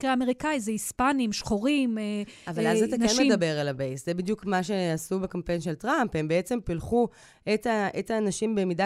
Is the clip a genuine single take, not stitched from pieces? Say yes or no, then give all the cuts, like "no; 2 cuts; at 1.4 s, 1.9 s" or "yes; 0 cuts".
yes; 0 cuts